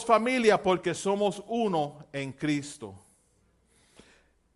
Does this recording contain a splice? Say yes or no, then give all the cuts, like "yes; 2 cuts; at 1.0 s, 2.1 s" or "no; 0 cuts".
no; 0 cuts